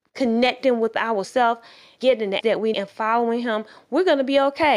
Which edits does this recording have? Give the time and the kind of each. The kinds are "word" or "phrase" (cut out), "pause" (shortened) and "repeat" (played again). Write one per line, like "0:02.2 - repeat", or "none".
0:01.2 - word
0:02.0 - word
0:02.4 - word
0:02.7 - word